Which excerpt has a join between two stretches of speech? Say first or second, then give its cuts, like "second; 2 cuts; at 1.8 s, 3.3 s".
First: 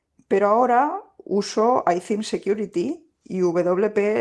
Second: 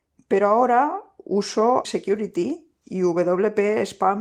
second; 1 cut; at 1.8 s